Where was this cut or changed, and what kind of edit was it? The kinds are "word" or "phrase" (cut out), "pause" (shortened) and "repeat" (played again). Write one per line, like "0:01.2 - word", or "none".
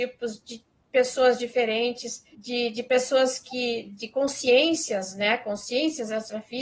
0:02.3 - pause